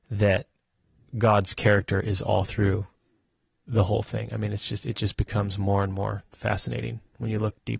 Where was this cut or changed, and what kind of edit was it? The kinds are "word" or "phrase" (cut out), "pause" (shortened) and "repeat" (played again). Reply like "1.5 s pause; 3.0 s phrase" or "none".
none